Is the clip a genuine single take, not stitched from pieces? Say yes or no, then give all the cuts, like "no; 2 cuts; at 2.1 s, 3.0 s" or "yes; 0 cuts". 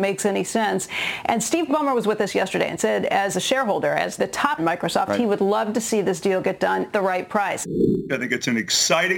no; 4 cuts; at 1.7 s, 4.2 s, 4.6 s, 6.9 s